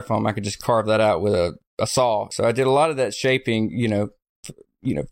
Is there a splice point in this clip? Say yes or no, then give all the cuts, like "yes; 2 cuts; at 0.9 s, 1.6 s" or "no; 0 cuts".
no; 0 cuts